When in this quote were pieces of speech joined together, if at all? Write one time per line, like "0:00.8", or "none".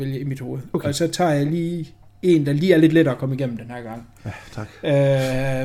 0:02.1